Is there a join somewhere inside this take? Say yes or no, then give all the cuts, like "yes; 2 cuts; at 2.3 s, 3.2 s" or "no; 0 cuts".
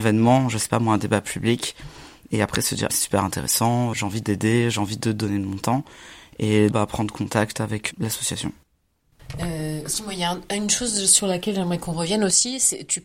yes; 4 cuts; at 2.9 s, 3.9 s, 6.7 s, 7.9 s